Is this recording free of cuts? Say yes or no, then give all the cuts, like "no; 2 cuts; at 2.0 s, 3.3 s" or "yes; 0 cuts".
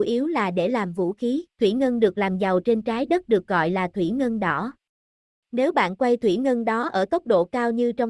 no; 1 cut; at 1.5 s